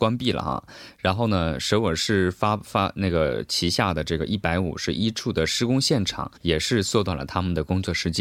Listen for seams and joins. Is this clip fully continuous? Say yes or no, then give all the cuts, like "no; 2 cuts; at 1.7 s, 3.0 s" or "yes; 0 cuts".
no; 1 cut; at 6.4 s